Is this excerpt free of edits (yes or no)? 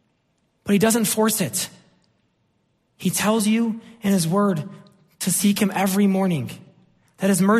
yes